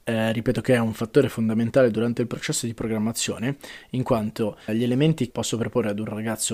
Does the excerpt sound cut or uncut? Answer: cut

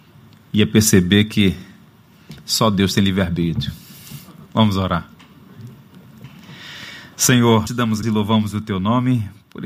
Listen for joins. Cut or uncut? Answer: cut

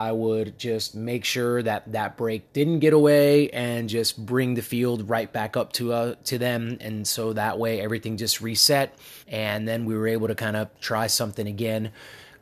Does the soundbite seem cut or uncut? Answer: cut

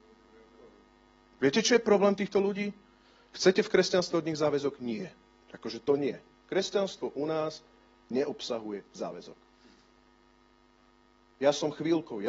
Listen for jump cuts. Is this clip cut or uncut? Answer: uncut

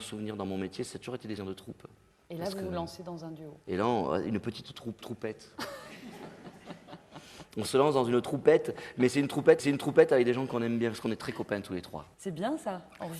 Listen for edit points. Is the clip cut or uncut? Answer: cut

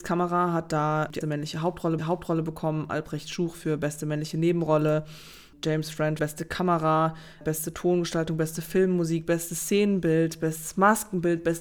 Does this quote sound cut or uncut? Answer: cut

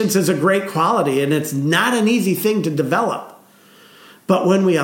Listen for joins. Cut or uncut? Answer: uncut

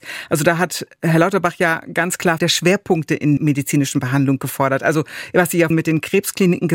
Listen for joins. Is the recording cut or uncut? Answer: cut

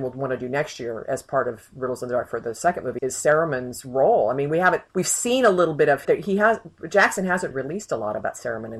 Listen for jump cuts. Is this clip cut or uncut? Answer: cut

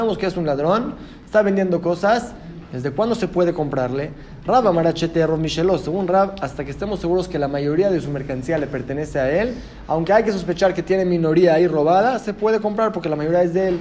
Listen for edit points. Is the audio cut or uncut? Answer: uncut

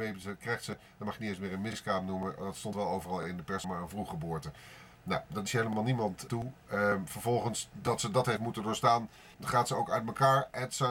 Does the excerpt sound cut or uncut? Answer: cut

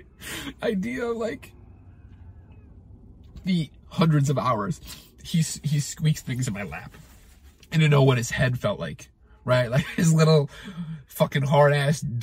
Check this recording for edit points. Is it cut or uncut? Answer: uncut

